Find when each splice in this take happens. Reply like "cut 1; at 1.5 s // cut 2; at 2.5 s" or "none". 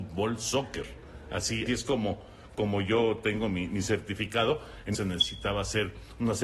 cut 1; at 1.7 s // cut 2; at 4.9 s